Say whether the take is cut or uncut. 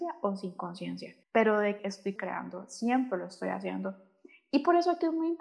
cut